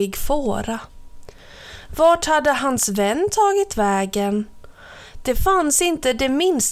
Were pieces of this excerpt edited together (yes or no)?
no